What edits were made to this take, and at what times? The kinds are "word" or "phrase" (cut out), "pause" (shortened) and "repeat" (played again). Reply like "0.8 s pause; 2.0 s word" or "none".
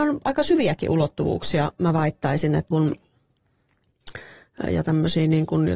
2.7 s word; 4.6 s word